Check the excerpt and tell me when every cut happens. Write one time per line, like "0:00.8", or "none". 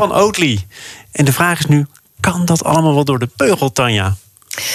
none